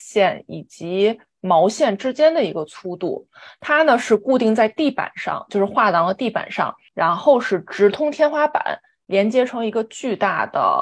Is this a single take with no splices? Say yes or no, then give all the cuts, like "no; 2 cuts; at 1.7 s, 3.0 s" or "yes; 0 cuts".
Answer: yes; 0 cuts